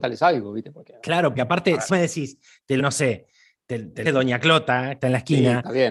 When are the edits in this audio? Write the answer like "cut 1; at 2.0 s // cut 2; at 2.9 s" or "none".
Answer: cut 1; at 1.3 s // cut 2; at 1.9 s // cut 3; at 2.8 s // cut 4; at 4.1 s // cut 5; at 5.0 s